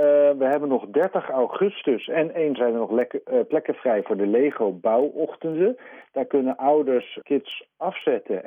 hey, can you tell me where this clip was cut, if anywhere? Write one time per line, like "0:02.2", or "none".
0:02.6
0:07.2